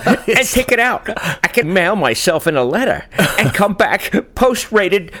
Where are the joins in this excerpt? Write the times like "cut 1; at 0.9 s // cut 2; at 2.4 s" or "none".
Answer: cut 1; at 1.6 s

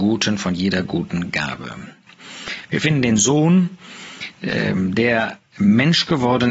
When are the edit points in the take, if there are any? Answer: cut 1; at 5.5 s

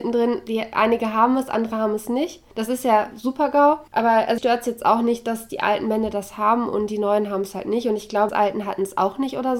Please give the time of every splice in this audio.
cut 1; at 2.5 s // cut 2; at 3.9 s // cut 3; at 4.4 s // cut 4; at 8.3 s

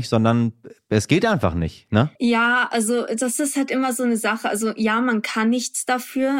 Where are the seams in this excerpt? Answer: cut 1; at 2.2 s

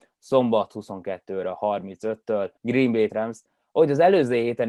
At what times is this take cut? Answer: cut 1; at 2.6 s // cut 2; at 3.1 s

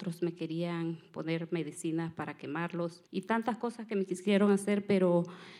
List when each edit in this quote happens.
cut 1; at 3.1 s

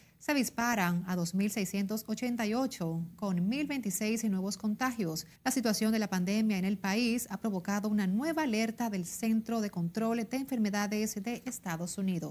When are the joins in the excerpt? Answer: cut 1; at 5.4 s

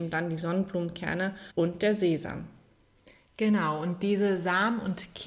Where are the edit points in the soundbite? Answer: cut 1; at 1.5 s

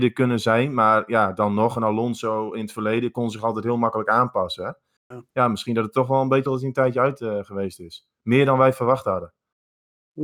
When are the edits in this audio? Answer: cut 1; at 6.5 s

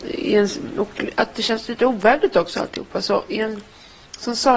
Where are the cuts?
none

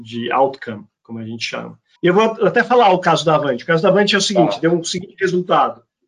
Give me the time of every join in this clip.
cut 1; at 1.0 s // cut 2; at 2.0 s

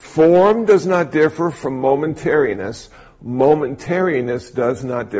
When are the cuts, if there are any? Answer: none

